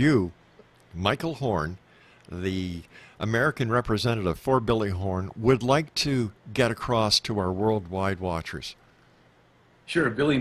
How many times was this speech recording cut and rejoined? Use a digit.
0